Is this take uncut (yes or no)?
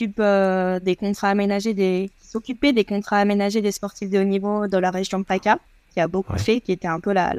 yes